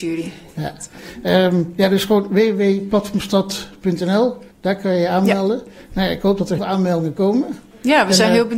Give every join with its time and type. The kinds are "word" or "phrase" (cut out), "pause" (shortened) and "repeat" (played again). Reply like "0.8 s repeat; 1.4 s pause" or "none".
4.5 s pause; 6.6 s word

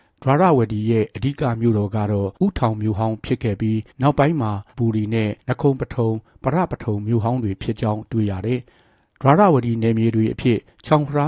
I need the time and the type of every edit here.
2.4 s pause; 3.9 s pause; 4.7 s word; 5.4 s pause

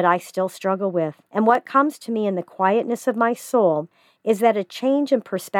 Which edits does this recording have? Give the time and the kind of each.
1.3 s pause

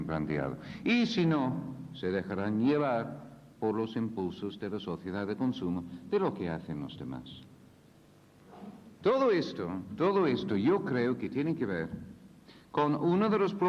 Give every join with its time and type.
9.0 s pause

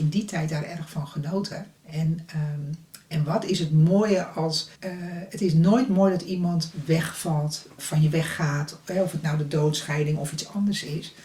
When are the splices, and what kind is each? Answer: 1.8 s pause; 4.8 s pause; 7.8 s word

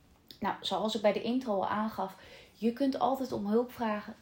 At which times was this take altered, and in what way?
none

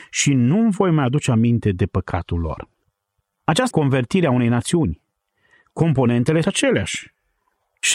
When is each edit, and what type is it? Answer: 3.7 s word; 6.4 s word

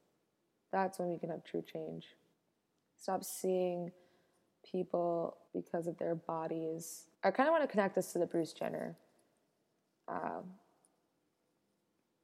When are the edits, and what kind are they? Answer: 2.3 s pause; 5.5 s pause; 7.1 s pause

